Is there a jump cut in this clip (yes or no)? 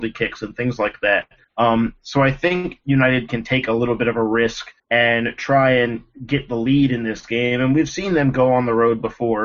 yes